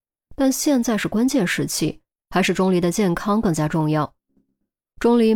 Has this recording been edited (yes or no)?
no